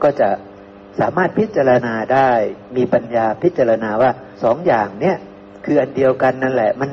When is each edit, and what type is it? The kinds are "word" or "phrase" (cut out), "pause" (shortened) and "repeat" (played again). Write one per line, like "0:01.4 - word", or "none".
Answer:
0:04.3 - pause
0:05.6 - pause